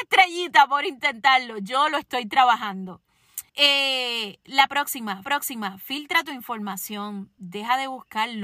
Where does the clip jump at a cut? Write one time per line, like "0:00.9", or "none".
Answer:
0:03.5
0:05.2
0:07.4